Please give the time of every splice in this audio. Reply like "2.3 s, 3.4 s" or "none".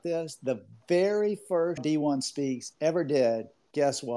1.8 s